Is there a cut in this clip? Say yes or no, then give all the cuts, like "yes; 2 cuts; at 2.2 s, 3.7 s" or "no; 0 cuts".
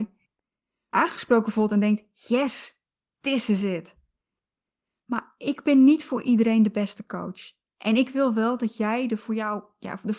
no; 0 cuts